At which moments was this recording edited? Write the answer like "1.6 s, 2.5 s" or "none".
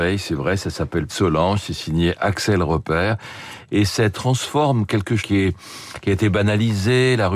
1.1 s, 4.1 s, 5.2 s